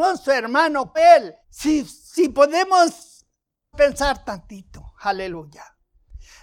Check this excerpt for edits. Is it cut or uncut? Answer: cut